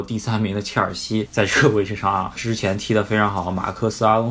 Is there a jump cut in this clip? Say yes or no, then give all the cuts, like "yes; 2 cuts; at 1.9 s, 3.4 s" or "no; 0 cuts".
yes; 1 cut; at 2.4 s